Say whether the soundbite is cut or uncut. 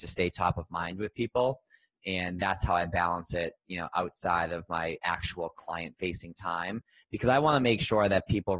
uncut